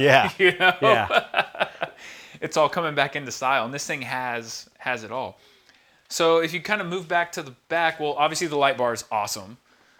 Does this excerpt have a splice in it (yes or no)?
no